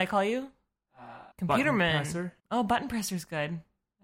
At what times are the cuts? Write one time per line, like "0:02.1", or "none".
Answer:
0:01.3
0:02.4